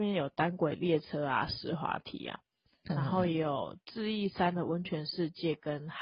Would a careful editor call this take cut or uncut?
uncut